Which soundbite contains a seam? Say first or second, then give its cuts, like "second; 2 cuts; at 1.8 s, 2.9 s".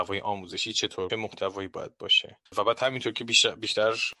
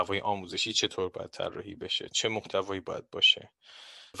first; 2 cuts; at 1.1 s, 2.5 s